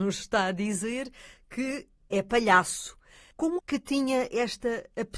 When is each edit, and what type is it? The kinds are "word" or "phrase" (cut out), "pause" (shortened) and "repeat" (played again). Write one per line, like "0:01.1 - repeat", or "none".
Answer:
0:03.6 - phrase